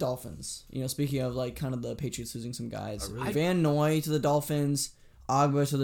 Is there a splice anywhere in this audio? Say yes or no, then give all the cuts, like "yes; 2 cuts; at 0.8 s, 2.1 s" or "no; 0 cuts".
no; 0 cuts